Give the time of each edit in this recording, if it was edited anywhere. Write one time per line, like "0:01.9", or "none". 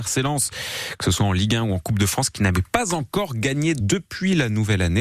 0:03.8